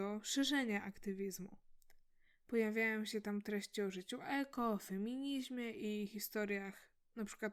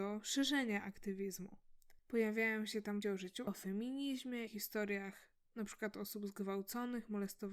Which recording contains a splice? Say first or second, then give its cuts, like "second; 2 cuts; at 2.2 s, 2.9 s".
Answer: second; 4 cuts; at 2.0 s, 3.0 s, 3.5 s, 4.5 s